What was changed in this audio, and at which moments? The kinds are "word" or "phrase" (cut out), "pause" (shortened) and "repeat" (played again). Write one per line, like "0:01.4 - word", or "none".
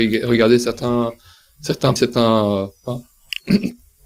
0:02.0 - word